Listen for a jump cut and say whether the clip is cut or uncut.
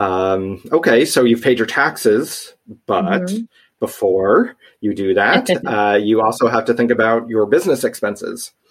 uncut